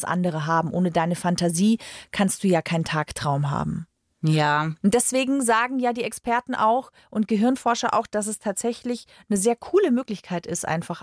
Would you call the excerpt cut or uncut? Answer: uncut